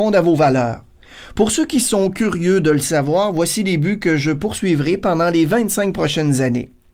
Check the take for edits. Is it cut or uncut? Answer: uncut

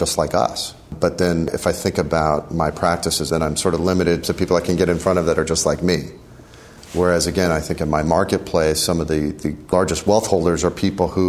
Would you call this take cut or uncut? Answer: cut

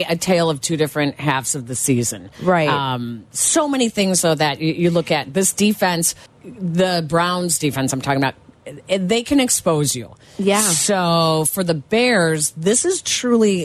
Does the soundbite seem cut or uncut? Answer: cut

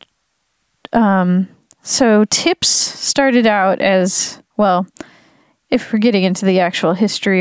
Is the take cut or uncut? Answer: uncut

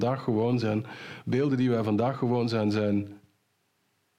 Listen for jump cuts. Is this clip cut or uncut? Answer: uncut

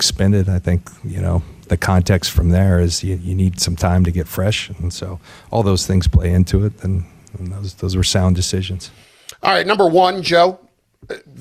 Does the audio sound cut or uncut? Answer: uncut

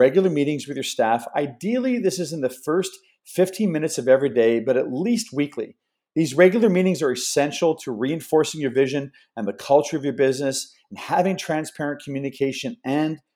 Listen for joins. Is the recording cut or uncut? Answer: uncut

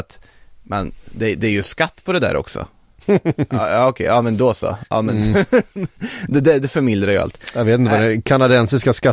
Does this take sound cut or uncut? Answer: uncut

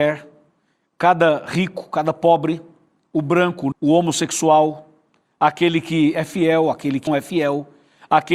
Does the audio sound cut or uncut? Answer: cut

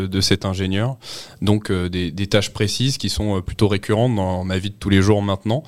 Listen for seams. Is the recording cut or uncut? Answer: uncut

